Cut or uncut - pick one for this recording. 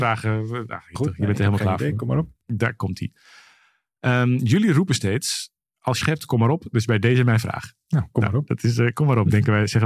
cut